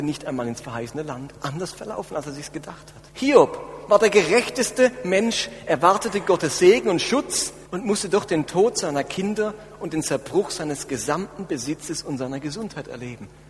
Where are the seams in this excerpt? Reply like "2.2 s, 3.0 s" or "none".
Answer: 3.1 s, 7.7 s